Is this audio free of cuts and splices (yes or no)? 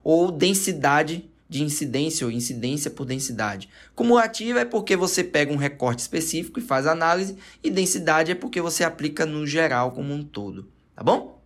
yes